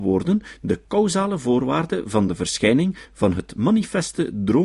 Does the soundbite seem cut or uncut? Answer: uncut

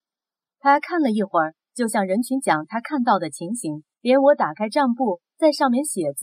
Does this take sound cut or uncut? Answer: cut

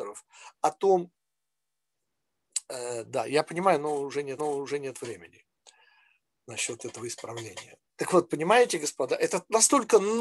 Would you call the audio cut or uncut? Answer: cut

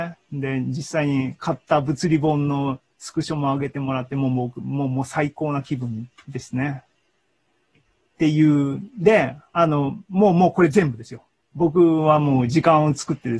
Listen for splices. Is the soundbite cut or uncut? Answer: uncut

